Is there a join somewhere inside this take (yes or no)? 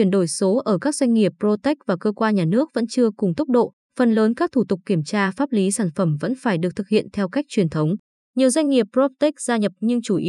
no